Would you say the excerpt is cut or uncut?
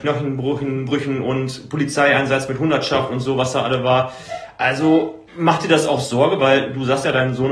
cut